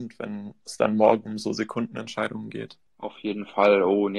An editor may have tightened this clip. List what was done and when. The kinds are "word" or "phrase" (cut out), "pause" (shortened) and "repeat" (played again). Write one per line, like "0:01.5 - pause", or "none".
0:02.9 - pause